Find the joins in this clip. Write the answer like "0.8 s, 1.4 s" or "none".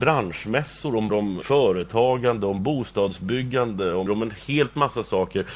1.1 s, 1.4 s, 4.1 s